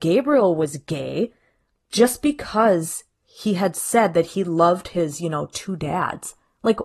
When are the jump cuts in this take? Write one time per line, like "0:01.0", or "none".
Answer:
none